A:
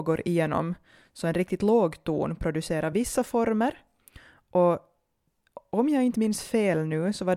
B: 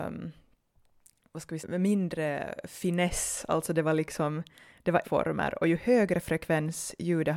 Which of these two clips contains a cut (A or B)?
B